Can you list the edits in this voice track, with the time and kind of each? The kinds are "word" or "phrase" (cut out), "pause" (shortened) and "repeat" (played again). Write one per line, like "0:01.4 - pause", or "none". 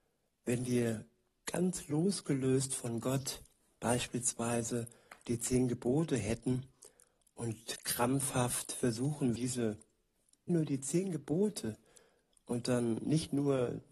0:09.4 - word
0:10.5 - word